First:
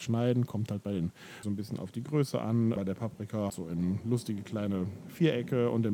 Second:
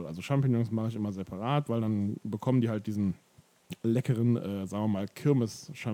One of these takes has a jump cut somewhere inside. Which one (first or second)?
first